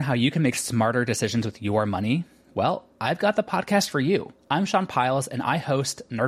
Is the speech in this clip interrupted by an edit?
yes; 1 cut; at 4.4 s

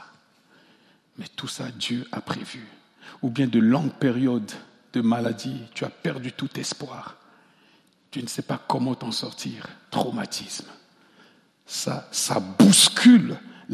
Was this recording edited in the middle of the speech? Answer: no; 0 cuts

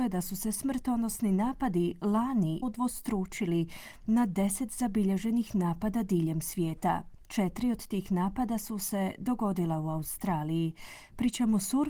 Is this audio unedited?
no; 1 cut; at 2.6 s

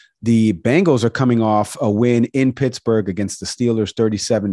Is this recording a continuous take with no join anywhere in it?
yes; 0 cuts

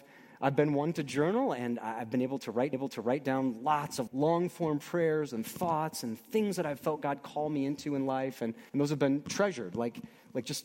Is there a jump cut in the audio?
yes; 3 cuts; at 2.7 s, 4.1 s, 8.7 s

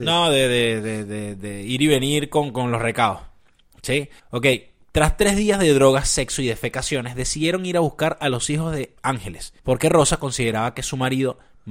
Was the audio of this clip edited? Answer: yes; 2 cuts; at 4.2 s, 9.6 s

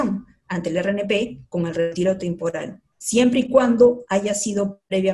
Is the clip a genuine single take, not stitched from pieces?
no; 1 cut; at 2.9 s

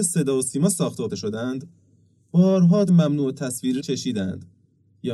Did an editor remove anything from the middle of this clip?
yes; 3 cuts; at 1.1 s, 2.9 s, 3.8 s

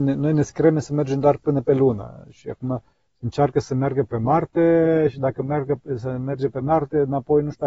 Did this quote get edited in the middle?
no; 0 cuts

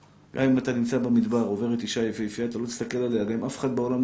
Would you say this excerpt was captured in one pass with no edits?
yes; 0 cuts

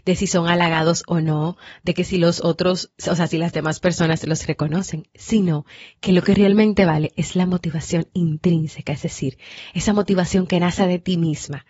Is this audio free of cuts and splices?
yes; 0 cuts

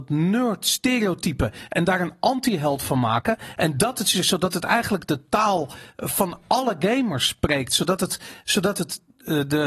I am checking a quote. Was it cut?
no; 0 cuts

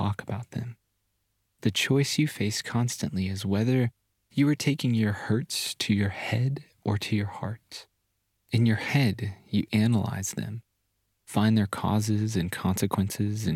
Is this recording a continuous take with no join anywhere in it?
yes; 0 cuts

